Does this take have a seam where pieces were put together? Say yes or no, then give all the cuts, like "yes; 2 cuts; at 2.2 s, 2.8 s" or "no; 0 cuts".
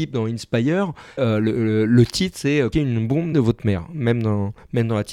yes; 3 cuts; at 1.2 s, 2.7 s, 3.3 s